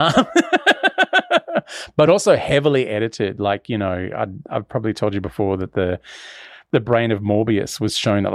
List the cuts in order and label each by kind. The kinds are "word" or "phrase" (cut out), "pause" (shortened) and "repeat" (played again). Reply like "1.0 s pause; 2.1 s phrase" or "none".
none

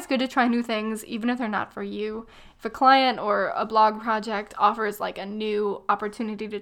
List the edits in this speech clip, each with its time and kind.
none

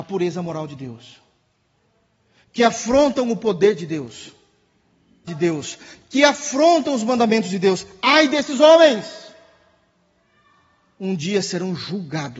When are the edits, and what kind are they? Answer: 5.3 s phrase

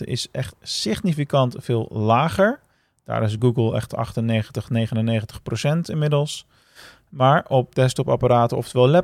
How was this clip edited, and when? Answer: none

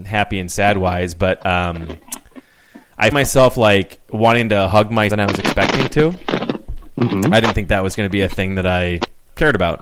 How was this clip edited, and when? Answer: 3.1 s word; 5.1 s phrase

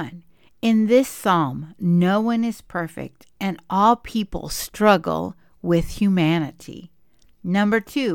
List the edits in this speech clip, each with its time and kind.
none

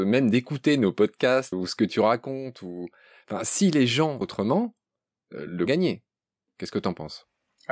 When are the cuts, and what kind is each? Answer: 1.5 s word; 4.2 s phrase; 5.7 s phrase

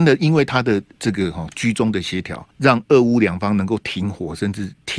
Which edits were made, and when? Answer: 0.9 s pause; 2.5 s pause

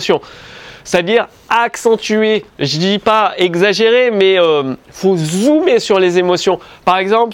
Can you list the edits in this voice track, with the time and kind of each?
2.5 s pause

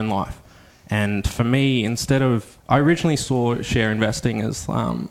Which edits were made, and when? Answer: 2.6 s pause

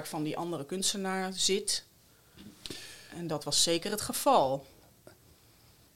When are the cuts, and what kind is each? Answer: none

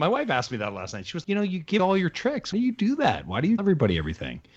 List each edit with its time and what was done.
1.2 s word; 1.8 s word; 2.5 s word; 3.6 s word

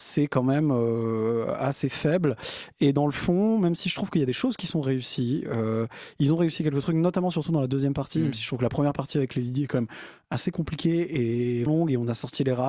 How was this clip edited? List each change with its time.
11.7 s word

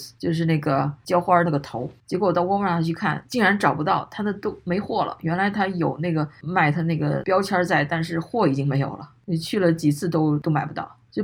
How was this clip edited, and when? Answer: none

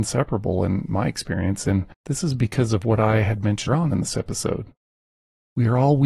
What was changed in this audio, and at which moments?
1.9 s pause; 3.7 s word

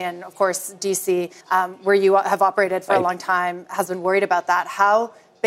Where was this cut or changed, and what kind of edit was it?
1.4 s pause

